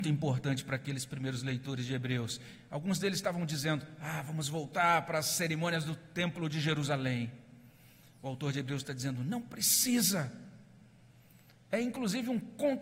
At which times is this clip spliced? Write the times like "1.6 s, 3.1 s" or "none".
none